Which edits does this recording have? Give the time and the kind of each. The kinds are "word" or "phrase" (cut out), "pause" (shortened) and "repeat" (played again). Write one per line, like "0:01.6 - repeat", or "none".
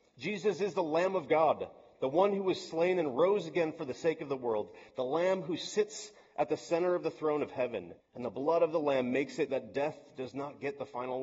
0:08.0 - pause
0:09.5 - word